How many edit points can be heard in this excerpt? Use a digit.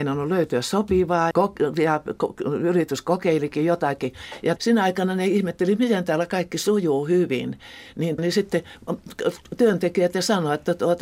3